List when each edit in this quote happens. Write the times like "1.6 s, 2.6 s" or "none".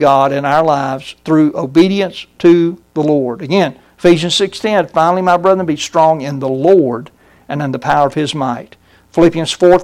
none